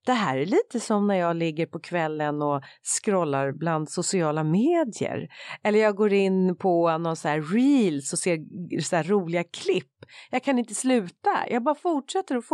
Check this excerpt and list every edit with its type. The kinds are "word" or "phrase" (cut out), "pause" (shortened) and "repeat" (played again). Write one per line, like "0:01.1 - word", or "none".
none